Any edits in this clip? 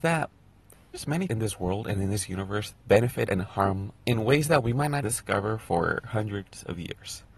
yes; 6 cuts; at 0.9 s, 1.3 s, 2.7 s, 3.3 s, 4.0 s, 5.0 s

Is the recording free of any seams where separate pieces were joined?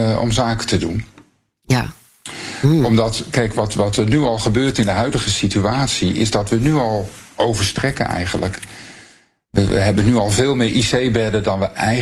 yes; 0 cuts

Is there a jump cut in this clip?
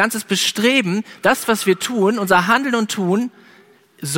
no; 0 cuts

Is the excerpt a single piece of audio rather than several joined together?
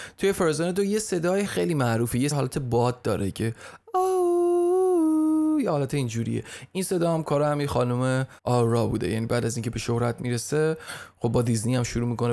no; 3 cuts; at 1.5 s, 2.3 s, 8.4 s

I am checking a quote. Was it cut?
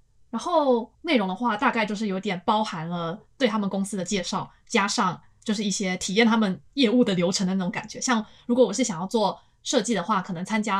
yes; 1 cut; at 0.9 s

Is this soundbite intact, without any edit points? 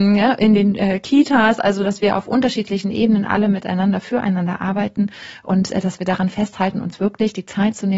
yes; 0 cuts

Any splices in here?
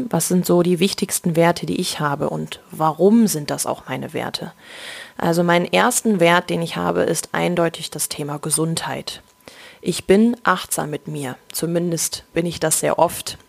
no; 0 cuts

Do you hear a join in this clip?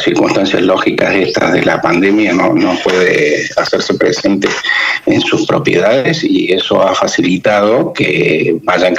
yes; 1 cut; at 2.3 s

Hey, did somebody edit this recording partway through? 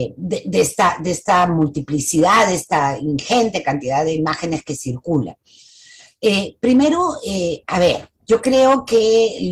yes; 2 cuts; at 7.6 s, 8.2 s

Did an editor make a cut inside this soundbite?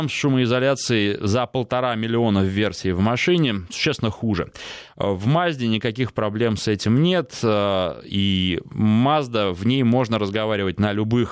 no; 0 cuts

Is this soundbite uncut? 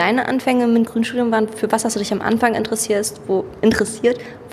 yes; 0 cuts

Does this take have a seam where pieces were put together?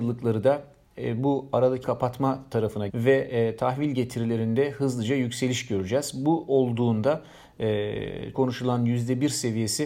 yes; 3 cuts; at 1.8 s, 2.9 s, 8.3 s

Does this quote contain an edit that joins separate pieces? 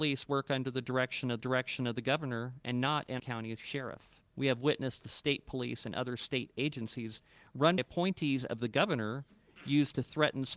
yes; 4 cuts; at 1.4 s, 3.2 s, 4.3 s, 7.8 s

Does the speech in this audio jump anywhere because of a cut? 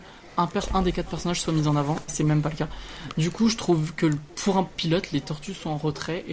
yes; 1 cut; at 2.1 s

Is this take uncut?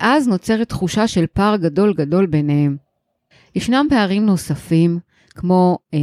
yes; 0 cuts

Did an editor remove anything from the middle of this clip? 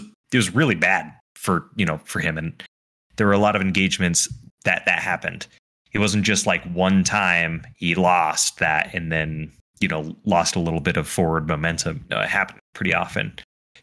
no; 0 cuts

